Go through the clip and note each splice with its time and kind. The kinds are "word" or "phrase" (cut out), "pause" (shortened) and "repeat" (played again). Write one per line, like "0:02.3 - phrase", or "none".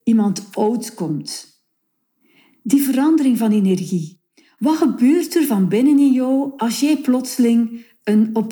none